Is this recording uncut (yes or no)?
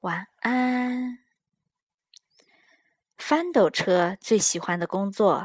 yes